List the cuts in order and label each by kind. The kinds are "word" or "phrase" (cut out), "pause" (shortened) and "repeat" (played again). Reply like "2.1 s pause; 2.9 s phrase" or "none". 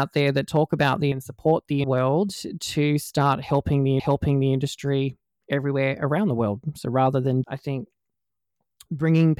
1.1 s word; 1.8 s phrase; 4.0 s repeat; 7.4 s word